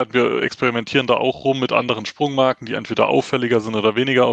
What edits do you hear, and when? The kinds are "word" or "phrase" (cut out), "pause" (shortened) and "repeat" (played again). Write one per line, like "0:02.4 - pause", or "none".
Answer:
none